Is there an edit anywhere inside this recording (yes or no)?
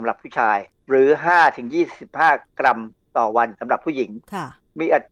no